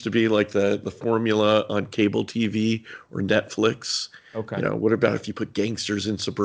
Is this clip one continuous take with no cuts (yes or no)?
yes